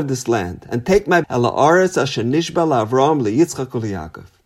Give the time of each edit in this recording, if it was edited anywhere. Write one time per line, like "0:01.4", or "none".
0:01.2